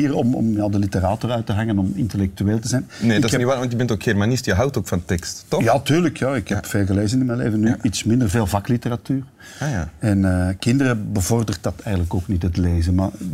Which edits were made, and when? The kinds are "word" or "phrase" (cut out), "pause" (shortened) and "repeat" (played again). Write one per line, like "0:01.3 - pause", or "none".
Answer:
none